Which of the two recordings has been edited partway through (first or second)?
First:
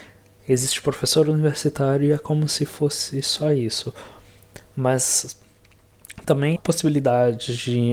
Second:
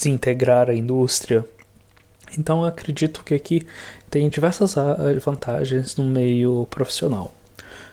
first